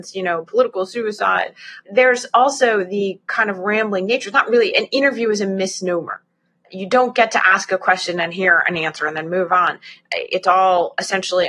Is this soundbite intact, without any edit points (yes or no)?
yes